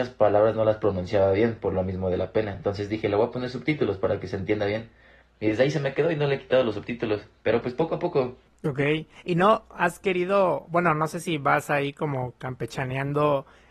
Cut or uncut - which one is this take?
uncut